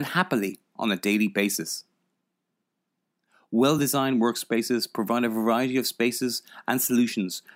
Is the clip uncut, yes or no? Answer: yes